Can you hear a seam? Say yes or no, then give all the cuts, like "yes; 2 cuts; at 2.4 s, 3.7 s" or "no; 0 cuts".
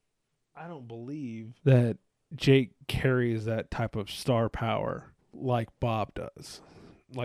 yes; 2 cuts; at 1.6 s, 5.2 s